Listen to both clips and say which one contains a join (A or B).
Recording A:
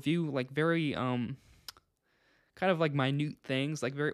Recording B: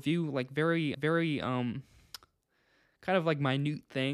B